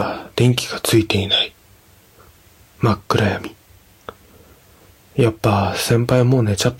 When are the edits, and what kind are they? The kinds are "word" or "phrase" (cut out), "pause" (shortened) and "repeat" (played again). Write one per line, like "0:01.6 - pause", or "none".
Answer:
none